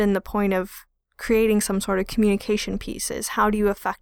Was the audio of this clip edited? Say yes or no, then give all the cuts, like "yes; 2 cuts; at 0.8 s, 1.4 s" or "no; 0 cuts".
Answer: no; 0 cuts